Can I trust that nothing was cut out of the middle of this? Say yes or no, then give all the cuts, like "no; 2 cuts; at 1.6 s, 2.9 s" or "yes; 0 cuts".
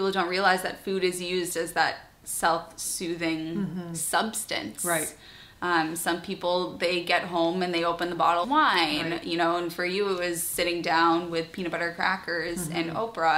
no; 1 cut; at 8.4 s